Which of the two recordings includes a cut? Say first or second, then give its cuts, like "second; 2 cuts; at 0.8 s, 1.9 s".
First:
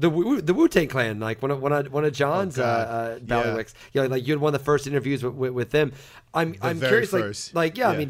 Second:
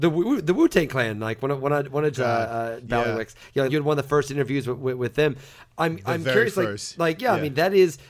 second; 2 cuts; at 2.1 s, 3.7 s